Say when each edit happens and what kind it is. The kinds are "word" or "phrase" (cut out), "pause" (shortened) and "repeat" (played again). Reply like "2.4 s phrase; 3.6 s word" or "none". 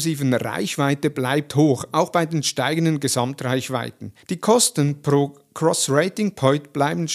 4.2 s pause